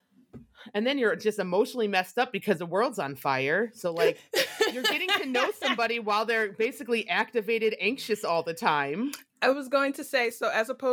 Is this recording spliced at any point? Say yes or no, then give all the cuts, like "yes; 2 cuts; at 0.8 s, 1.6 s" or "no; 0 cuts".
no; 0 cuts